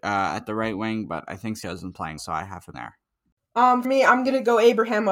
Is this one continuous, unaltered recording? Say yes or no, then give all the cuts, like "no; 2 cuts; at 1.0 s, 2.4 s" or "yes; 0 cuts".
no; 4 cuts; at 1.6 s, 2.2 s, 2.7 s, 3.8 s